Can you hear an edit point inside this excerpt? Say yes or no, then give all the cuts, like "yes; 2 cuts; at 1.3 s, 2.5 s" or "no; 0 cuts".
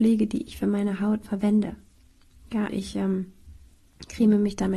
yes; 2 cuts; at 1.2 s, 2.7 s